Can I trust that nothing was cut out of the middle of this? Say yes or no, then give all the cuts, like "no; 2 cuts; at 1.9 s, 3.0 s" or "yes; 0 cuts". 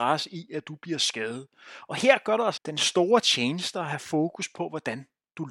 no; 1 cut; at 2.6 s